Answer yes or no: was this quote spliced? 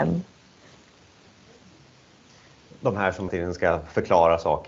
yes